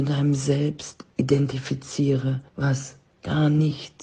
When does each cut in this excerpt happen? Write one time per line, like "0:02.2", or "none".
0:02.5